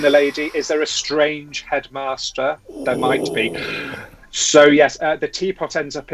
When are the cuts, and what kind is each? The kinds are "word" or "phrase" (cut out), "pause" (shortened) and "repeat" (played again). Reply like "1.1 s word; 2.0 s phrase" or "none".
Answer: none